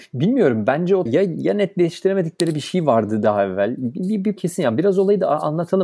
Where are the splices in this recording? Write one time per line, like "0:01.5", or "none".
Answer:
0:01.1
0:04.4